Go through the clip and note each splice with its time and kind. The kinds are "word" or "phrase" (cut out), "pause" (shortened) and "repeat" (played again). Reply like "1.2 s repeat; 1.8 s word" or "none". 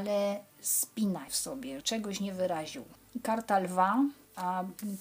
1.3 s word; 1.8 s word